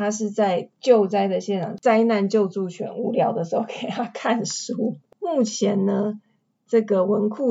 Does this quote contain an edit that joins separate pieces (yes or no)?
no